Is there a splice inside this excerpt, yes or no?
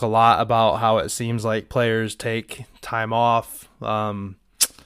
no